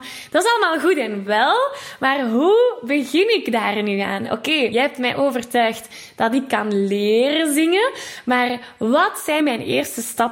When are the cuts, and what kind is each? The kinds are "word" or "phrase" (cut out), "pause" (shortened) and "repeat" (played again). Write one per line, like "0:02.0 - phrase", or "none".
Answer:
0:04.7 - word
0:09.4 - word